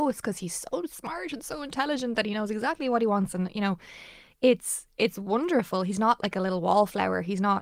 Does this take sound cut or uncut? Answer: uncut